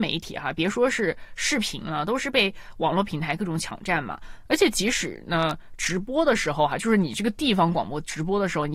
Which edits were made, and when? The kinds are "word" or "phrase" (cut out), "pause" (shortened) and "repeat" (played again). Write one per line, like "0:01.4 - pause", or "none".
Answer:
none